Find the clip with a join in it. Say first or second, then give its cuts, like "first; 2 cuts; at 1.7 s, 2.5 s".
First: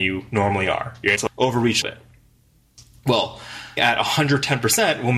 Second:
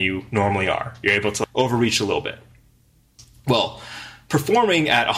first; 3 cuts; at 1.2 s, 1.8 s, 3.8 s